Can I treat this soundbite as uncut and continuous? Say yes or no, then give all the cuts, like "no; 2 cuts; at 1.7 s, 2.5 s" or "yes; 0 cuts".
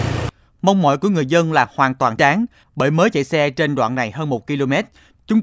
no; 1 cut; at 2.2 s